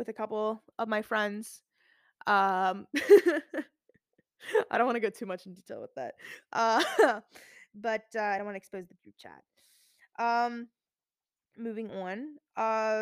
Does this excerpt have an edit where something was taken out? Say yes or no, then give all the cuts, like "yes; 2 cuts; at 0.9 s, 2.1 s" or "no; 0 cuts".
no; 0 cuts